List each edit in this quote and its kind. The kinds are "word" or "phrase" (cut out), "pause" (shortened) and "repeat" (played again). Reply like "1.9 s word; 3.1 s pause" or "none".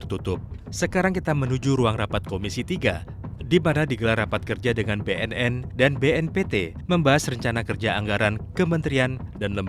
none